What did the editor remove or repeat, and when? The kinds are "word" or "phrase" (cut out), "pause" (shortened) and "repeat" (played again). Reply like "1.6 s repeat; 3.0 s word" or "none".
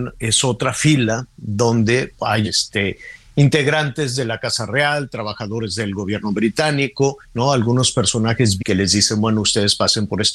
2.4 s word; 7.2 s pause; 8.6 s word